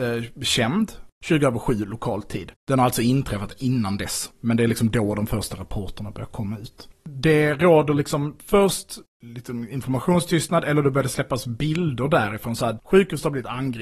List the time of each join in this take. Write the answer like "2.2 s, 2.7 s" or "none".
none